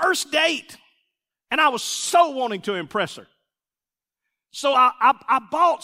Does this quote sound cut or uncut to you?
uncut